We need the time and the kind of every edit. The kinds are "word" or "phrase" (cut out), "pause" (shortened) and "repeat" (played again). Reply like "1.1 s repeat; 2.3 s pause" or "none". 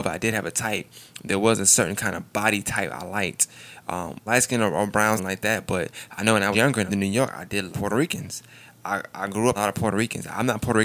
4.3 s word; 5.2 s word; 6.5 s word; 6.9 s word; 7.7 s word; 9.5 s word